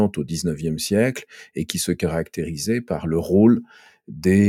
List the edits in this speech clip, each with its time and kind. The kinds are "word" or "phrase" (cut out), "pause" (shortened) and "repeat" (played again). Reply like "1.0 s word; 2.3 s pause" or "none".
none